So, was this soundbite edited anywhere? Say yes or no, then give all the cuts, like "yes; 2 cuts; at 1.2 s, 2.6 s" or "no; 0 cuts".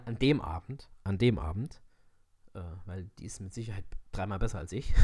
no; 0 cuts